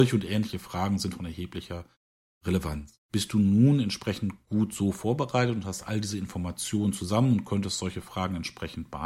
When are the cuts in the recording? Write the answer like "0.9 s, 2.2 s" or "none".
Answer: 3.0 s